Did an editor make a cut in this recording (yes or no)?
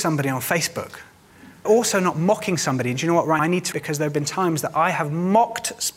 yes